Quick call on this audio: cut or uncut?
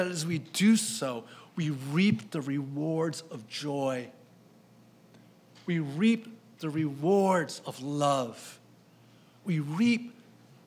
uncut